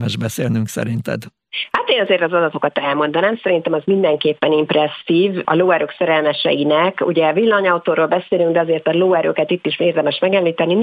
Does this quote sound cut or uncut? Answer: uncut